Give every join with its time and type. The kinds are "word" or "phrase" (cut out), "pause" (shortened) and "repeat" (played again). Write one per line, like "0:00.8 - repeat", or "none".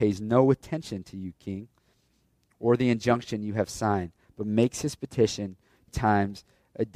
0:05.9 - word